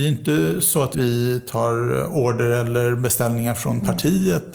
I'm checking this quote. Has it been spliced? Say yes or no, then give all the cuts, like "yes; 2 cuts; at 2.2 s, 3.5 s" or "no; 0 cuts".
yes; 1 cut; at 0.9 s